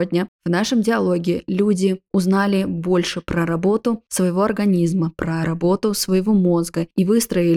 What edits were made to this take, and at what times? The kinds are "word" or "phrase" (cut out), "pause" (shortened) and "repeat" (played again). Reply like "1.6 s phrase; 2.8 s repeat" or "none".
none